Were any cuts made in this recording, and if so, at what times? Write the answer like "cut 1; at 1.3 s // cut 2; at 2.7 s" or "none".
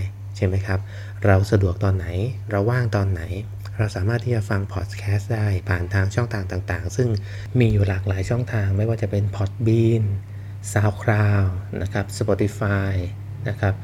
none